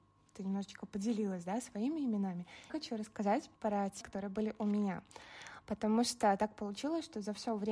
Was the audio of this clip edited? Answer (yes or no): yes